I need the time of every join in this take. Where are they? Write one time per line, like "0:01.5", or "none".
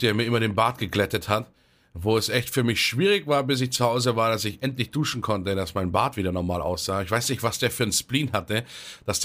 none